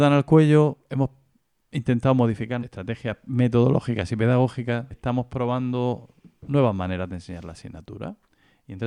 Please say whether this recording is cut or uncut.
cut